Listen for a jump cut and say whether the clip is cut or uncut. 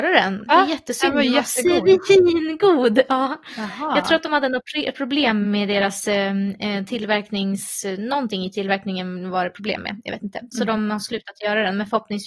uncut